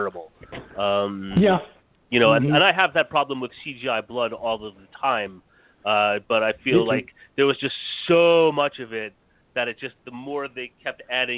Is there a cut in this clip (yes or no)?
no